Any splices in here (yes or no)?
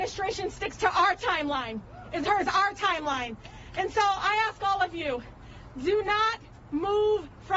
yes